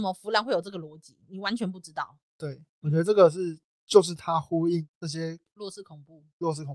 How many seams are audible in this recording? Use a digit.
1